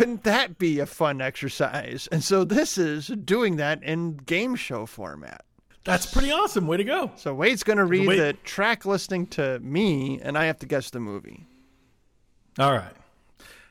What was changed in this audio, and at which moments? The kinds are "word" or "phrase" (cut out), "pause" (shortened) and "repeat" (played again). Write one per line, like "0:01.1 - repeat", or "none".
none